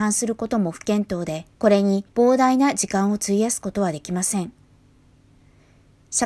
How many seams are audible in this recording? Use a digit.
2